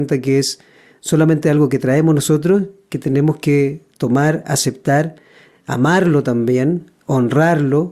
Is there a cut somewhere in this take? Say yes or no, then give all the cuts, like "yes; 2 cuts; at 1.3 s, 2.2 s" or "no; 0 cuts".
no; 0 cuts